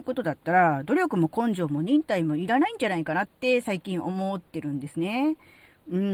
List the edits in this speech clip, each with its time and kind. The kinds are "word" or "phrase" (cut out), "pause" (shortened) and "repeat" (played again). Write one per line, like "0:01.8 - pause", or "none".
0:03.3 - pause
0:04.5 - pause